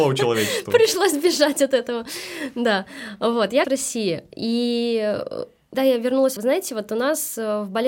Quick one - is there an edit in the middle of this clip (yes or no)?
yes